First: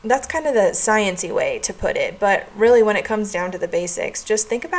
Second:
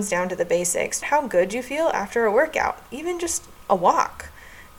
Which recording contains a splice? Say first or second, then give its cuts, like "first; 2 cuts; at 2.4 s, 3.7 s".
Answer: second; 1 cut; at 1.0 s